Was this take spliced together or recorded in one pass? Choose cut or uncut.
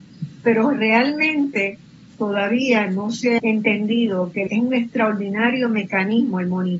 cut